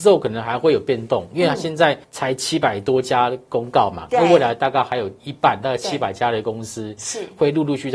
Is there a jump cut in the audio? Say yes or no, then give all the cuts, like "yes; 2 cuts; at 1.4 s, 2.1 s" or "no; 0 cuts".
yes; 2 cuts; at 2.0 s, 5.2 s